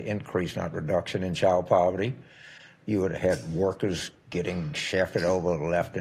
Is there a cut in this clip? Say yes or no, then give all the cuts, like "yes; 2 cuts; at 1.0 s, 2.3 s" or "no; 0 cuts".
no; 0 cuts